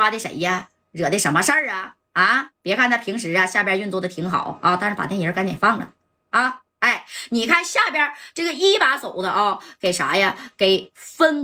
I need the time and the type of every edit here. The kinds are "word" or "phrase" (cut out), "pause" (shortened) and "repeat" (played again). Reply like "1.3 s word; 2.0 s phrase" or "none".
2.5 s pause; 6.7 s pause